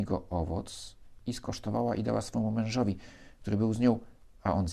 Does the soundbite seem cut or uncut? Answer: uncut